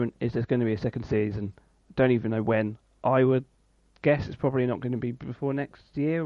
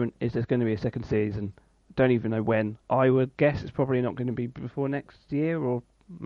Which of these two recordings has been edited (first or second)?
second